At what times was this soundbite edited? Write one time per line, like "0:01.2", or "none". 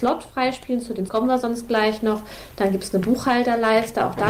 0:01.1